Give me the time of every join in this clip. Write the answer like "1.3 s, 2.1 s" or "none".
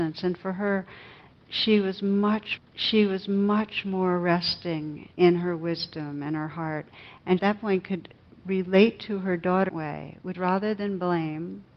2.6 s, 5.1 s, 7.4 s, 8.3 s, 9.7 s, 10.3 s